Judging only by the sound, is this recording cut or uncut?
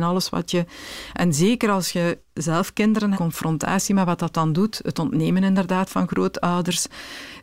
cut